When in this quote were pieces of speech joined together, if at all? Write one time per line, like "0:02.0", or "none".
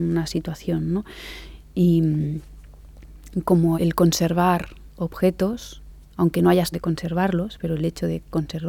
0:03.7
0:05.9
0:06.7